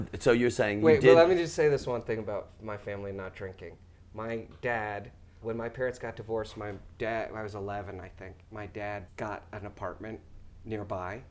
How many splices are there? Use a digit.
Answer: 2